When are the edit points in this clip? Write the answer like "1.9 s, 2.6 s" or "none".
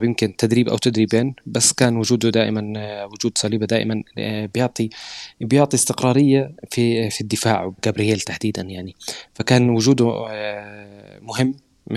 7.8 s